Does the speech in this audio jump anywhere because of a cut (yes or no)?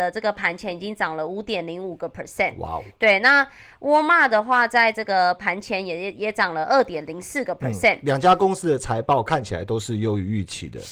no